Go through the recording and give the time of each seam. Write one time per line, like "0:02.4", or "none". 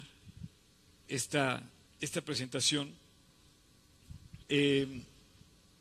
0:01.1
0:01.9
0:04.4